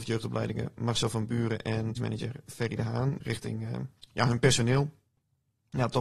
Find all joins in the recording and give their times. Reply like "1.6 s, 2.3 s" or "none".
2.0 s, 3.2 s, 4.0 s